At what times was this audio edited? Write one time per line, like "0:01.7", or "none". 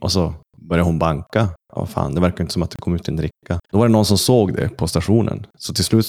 0:01.6
0:03.6